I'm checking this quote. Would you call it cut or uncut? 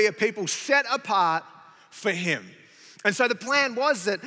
uncut